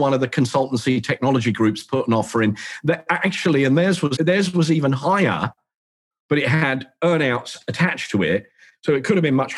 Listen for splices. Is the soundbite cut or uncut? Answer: cut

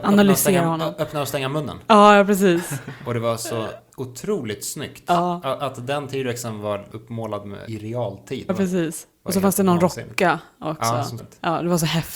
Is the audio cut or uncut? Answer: cut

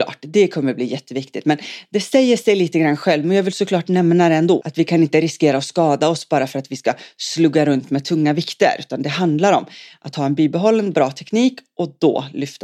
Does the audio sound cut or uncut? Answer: cut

